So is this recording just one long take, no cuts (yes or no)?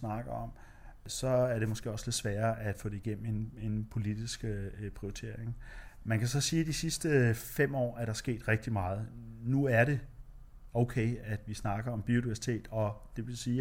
yes